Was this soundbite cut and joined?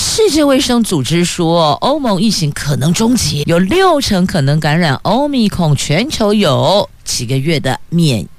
yes; 1 cut; at 3.4 s

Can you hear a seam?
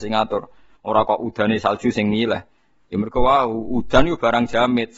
no; 0 cuts

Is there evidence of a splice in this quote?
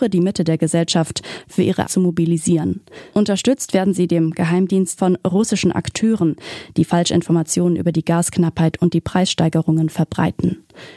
yes; 2 cuts; at 1.8 s, 5.0 s

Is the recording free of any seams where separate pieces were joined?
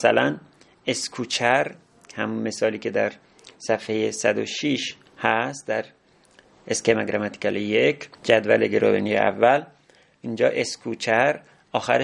no; 2 cuts; at 5.1 s, 8.1 s

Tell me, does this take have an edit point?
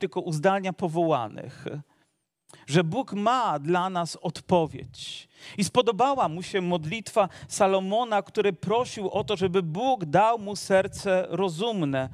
no; 0 cuts

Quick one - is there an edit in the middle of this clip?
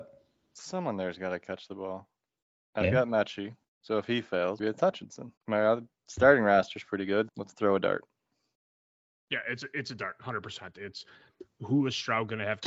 yes; 4 cuts; at 3.6 s, 4.6 s, 5.4 s, 7.3 s

